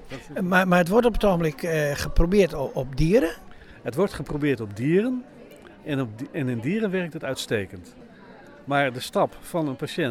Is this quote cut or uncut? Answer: uncut